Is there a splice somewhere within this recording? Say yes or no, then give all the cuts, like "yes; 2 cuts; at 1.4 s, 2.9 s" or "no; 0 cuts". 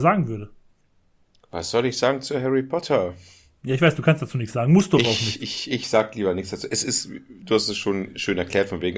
no; 0 cuts